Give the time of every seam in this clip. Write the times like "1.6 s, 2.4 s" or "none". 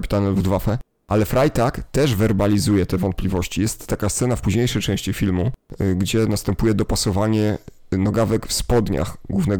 none